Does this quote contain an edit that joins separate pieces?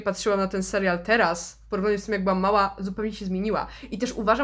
no; 0 cuts

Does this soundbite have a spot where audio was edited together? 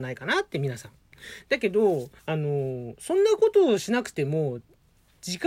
yes; 1 cut; at 2.2 s

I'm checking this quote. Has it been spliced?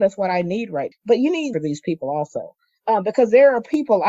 yes; 2 cuts; at 0.9 s, 1.5 s

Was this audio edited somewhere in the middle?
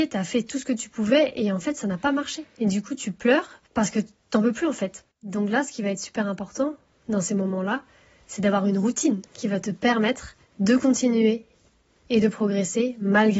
yes; 4 cuts; at 3.7 s, 5.1 s, 9.3 s, 10.5 s

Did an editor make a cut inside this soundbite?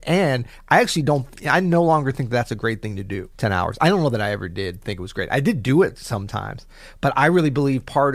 yes; 1 cut; at 3.3 s

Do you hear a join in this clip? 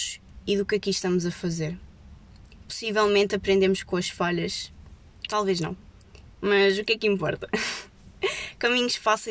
yes; 1 cut; at 5.3 s

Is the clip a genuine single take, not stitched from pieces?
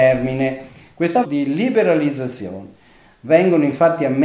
no; 1 cut; at 1.2 s

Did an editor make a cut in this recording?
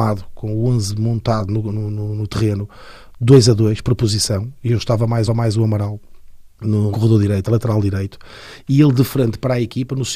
yes; 2 cuts; at 5.3 s, 6.9 s

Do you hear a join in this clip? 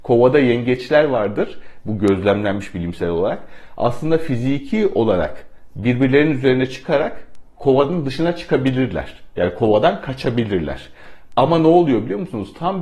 no; 0 cuts

